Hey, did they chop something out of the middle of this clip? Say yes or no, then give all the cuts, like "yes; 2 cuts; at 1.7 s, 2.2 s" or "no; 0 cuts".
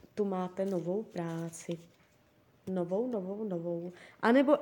no; 0 cuts